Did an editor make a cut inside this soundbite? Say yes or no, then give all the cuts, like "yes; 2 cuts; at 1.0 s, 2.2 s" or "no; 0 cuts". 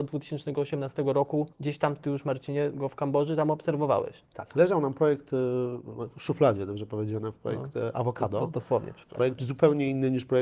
yes; 1 cut; at 1.5 s